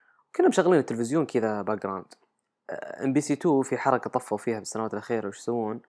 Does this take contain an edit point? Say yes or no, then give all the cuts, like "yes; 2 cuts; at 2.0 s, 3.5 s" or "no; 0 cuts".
no; 0 cuts